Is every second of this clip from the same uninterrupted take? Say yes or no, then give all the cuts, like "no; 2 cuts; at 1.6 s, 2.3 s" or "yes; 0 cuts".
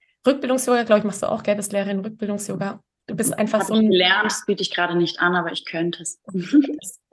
yes; 0 cuts